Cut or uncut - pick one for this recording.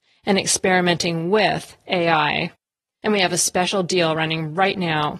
uncut